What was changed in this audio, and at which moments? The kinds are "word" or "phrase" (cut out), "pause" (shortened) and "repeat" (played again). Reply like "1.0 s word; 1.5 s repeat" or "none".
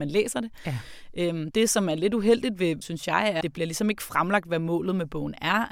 2.8 s phrase; 3.4 s word